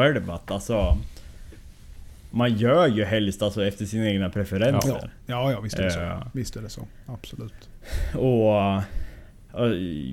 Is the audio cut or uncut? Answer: uncut